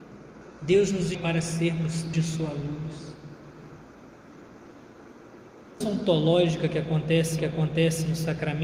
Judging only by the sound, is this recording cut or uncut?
cut